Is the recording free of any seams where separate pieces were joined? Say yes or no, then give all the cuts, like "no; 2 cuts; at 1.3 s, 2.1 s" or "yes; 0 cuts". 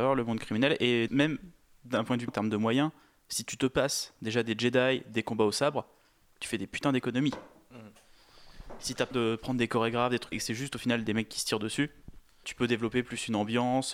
no; 5 cuts; at 1.1 s, 2.3 s, 9.1 s, 10.3 s, 12.4 s